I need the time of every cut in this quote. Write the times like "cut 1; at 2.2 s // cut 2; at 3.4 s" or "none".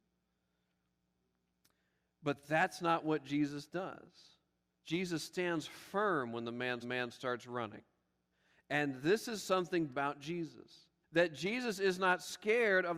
cut 1; at 6.8 s // cut 2; at 8.3 s // cut 3; at 9.9 s // cut 4; at 11.0 s